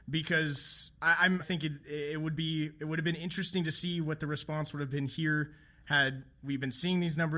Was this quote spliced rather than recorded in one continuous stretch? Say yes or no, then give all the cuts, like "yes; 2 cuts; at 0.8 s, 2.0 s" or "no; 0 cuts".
yes; 2 cuts; at 0.9 s, 1.4 s